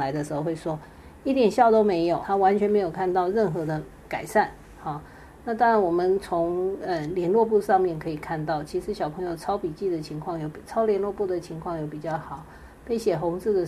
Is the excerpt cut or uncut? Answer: cut